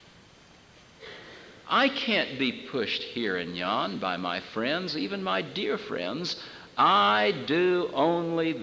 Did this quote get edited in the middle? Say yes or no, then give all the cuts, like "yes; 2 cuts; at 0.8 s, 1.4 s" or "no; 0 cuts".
no; 0 cuts